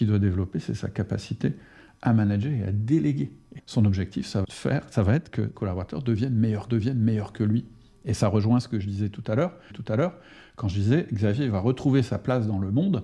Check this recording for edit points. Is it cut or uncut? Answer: cut